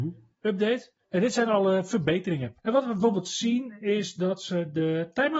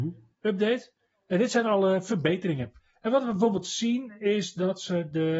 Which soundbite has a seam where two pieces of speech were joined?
first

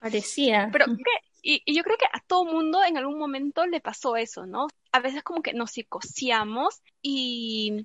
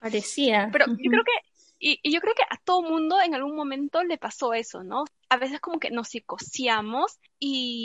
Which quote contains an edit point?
first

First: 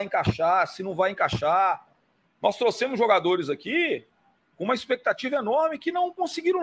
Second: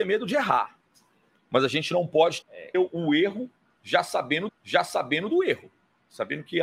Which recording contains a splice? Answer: second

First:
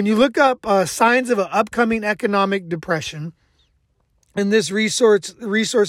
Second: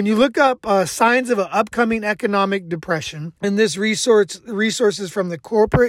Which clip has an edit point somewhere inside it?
second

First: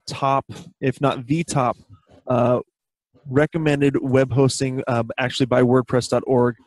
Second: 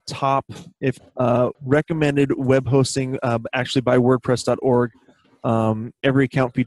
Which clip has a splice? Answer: second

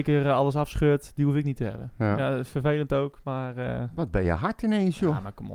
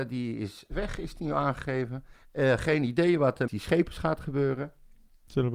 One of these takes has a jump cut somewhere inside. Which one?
second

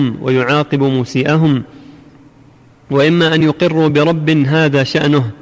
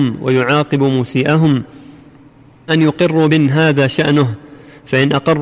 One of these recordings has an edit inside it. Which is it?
second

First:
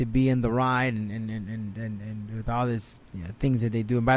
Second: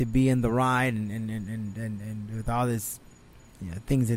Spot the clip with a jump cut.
first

